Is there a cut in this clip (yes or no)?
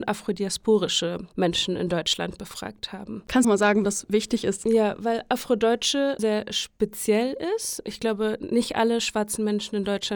yes